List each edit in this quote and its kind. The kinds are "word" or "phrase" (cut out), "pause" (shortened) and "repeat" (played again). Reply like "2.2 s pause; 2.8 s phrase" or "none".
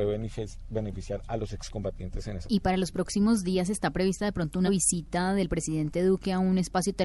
2.4 s word; 4.7 s word